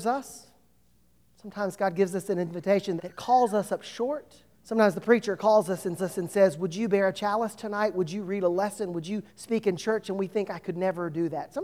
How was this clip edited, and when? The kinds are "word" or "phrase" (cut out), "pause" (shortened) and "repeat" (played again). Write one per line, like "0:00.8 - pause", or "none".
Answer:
0:03.0 - word
0:04.5 - pause
0:06.0 - repeat
0:09.3 - pause